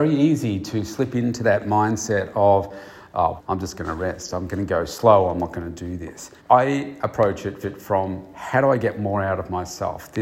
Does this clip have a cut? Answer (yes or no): yes